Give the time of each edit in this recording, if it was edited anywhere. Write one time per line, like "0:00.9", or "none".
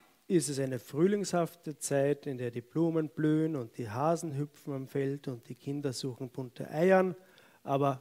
none